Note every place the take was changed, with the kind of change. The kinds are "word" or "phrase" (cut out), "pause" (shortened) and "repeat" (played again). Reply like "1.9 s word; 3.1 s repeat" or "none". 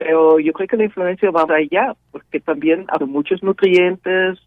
1.5 s word; 3.0 s word